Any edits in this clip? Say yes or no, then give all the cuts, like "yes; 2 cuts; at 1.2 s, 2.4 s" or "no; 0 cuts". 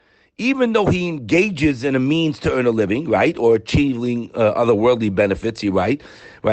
no; 0 cuts